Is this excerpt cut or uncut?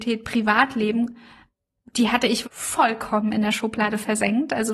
cut